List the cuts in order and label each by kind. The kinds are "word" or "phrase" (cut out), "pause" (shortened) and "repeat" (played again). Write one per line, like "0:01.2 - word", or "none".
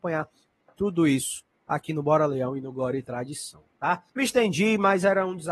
0:04.1 - pause